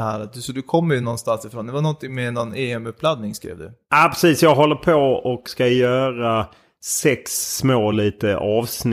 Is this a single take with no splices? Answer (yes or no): yes